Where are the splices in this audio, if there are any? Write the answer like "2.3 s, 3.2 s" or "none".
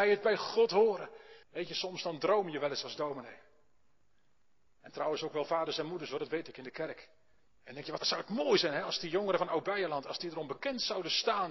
1.4 s, 7.5 s, 8.0 s